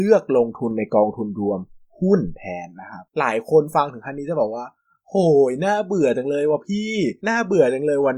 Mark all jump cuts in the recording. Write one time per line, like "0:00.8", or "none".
0:03.1
0:07.2

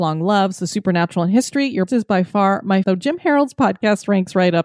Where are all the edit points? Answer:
0:01.9
0:02.8

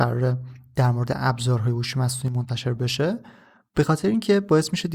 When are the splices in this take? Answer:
none

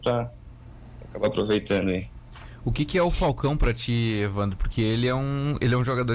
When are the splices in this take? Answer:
none

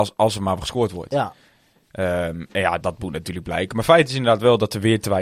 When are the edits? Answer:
0:02.8

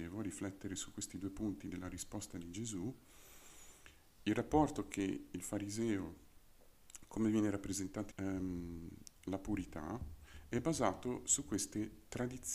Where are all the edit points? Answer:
0:08.1

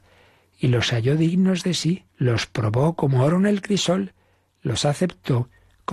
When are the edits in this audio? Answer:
0:02.1

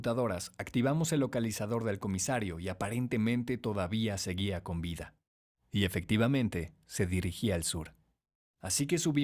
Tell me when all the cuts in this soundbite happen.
none

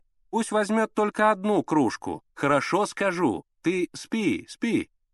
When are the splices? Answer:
0:02.3

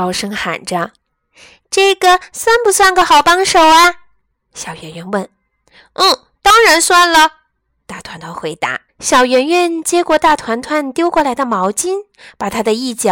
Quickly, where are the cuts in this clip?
0:08.9

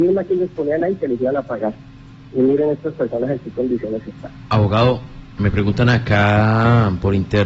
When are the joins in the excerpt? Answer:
0:05.4

